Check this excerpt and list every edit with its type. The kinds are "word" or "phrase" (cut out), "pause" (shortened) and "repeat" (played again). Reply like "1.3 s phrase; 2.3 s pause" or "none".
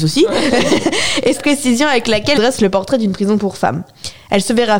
1.3 s word; 2.3 s word